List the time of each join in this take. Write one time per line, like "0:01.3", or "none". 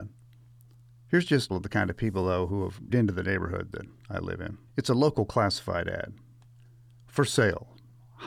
0:01.5
0:02.9
0:04.7